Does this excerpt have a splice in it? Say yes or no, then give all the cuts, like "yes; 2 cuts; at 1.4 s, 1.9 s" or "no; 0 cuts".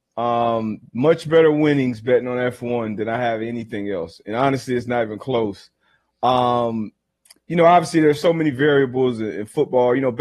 no; 0 cuts